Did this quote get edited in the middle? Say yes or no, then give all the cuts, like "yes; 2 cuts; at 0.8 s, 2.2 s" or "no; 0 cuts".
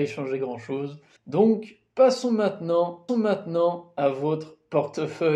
yes; 2 cuts; at 1.2 s, 3.1 s